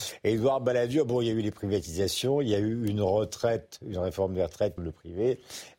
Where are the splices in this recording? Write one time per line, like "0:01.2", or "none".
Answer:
0:04.8